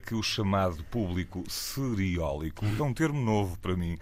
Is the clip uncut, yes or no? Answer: no